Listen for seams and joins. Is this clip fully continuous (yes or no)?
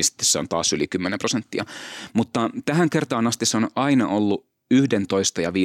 yes